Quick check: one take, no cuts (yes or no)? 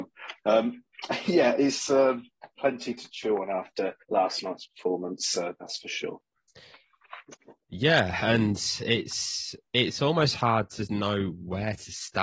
no